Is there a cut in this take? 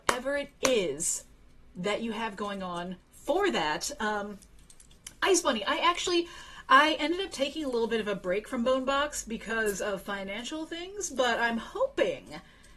no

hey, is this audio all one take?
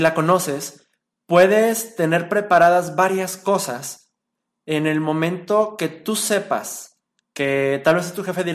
yes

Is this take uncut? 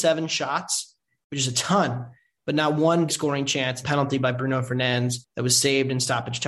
no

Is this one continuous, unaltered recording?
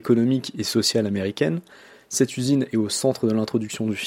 yes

